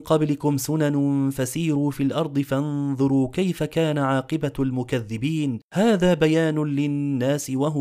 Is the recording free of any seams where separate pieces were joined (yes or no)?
no